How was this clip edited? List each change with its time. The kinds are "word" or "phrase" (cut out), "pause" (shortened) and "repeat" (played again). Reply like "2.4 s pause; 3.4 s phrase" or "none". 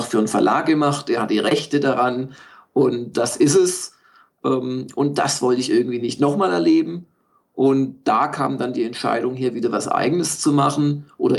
none